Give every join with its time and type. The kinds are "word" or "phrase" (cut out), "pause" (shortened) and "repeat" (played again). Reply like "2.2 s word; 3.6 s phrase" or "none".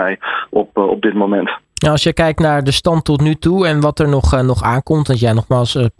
1.6 s pause